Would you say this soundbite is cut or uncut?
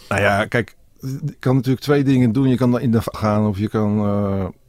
cut